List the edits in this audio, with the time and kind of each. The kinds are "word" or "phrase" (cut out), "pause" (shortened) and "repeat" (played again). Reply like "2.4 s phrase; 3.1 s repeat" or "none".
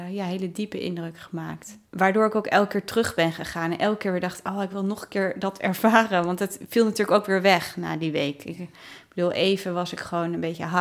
1.9 s pause